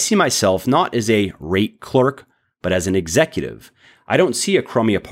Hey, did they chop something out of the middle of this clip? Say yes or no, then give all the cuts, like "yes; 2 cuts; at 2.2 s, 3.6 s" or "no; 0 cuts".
no; 0 cuts